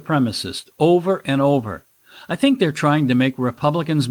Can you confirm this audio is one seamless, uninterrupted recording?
yes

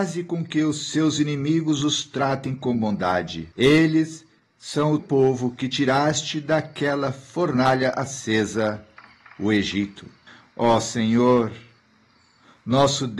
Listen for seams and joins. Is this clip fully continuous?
no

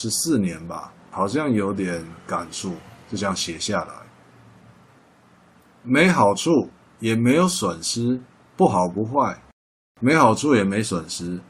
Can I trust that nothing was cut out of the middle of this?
yes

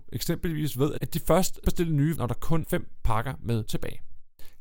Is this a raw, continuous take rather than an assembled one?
no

